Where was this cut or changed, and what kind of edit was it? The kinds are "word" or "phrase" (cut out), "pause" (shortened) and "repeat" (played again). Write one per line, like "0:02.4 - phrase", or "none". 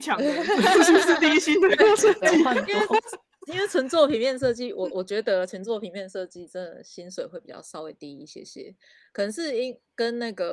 none